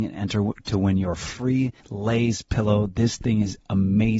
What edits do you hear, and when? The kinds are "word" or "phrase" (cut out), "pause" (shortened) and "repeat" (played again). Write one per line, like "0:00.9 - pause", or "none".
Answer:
0:01.8 - pause